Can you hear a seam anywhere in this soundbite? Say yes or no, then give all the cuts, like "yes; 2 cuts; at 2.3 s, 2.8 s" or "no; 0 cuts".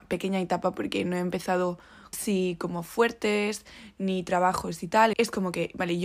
yes; 2 cuts; at 2.1 s, 5.1 s